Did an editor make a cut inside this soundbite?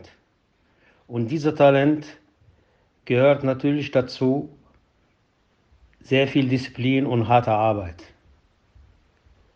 no; 0 cuts

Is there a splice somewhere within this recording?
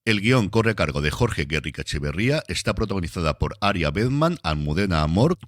no; 0 cuts

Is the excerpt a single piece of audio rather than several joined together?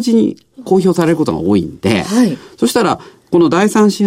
yes; 0 cuts

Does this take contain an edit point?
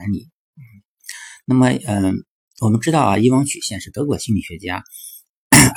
no; 0 cuts

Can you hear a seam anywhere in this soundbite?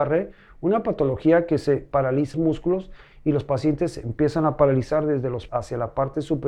yes; 2 cuts; at 2.3 s, 5.5 s

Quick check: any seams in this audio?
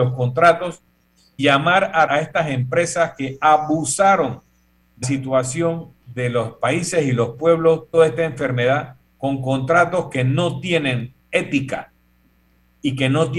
yes; 4 cuts; at 1.4 s, 2.1 s, 5.0 s, 7.9 s

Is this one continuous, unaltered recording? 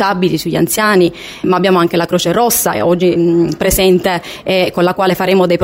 no; 2 cuts; at 1.4 s, 3.2 s

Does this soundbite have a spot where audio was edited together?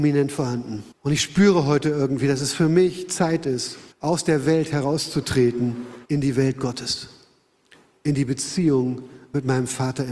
yes; 3 cuts; at 0.9 s, 3.9 s, 6.0 s

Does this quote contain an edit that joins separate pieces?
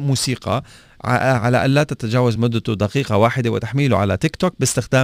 no; 0 cuts

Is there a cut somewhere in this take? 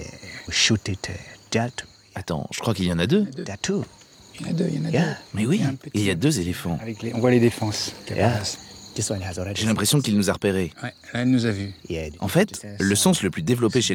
no; 0 cuts

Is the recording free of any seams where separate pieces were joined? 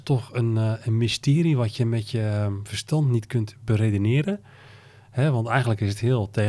yes; 0 cuts

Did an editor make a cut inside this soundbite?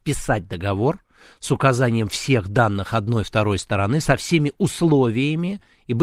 no; 0 cuts

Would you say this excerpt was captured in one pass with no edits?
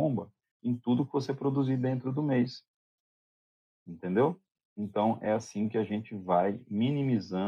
yes; 0 cuts

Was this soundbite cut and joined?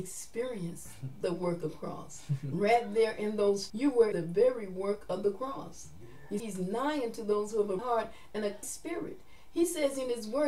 yes; 6 cuts; at 1.6 s, 3.7 s, 4.1 s, 6.4 s, 7.8 s, 8.6 s

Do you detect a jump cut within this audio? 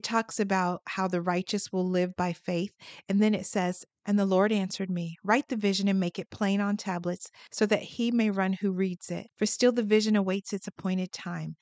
yes; 1 cut; at 9.3 s

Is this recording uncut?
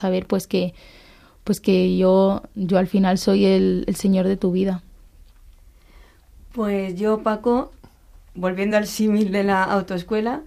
yes; 0 cuts

